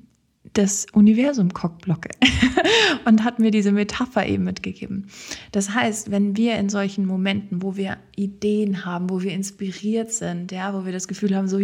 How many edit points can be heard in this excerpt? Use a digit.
0